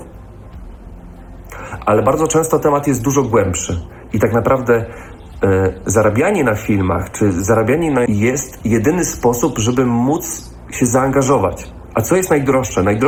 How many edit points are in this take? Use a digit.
1